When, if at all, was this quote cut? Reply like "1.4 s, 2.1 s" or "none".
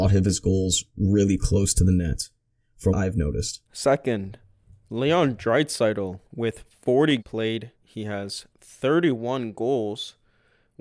2.9 s, 3.7 s, 6.3 s, 7.2 s, 7.7 s, 8.5 s

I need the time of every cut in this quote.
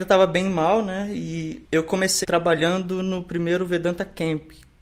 2.2 s

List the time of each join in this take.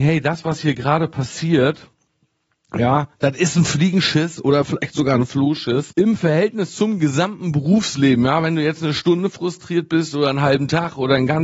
none

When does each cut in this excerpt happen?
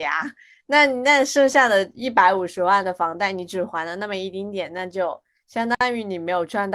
none

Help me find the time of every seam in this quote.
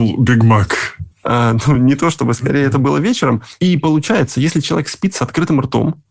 none

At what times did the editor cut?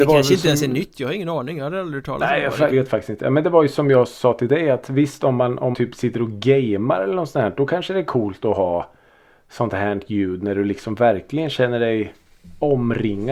2.7 s, 5.7 s

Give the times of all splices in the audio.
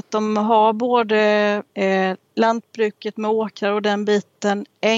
1.7 s

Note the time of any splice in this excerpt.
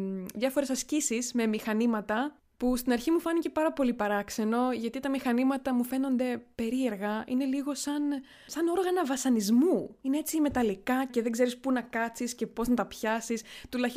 8.5 s, 11.1 s

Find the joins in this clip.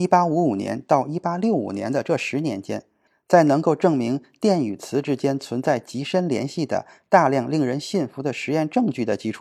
none

